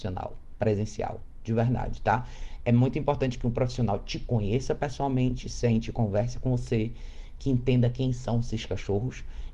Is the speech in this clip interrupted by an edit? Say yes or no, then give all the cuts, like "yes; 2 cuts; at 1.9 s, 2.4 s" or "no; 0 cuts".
no; 0 cuts